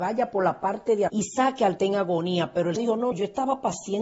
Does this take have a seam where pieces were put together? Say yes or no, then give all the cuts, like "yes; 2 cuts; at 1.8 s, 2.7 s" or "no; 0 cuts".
yes; 4 cuts; at 1.1 s, 1.8 s, 2.8 s, 3.1 s